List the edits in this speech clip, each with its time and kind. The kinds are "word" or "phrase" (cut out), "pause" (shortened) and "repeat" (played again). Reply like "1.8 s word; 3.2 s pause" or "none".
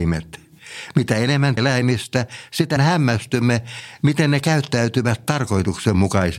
1.6 s word; 2.8 s word